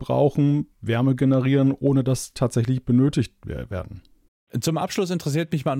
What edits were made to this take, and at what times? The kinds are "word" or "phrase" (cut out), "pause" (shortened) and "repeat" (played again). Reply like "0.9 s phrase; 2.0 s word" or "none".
2.3 s word